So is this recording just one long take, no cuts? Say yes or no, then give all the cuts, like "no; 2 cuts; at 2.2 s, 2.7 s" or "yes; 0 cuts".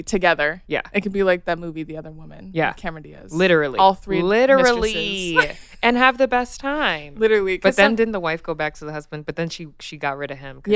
yes; 0 cuts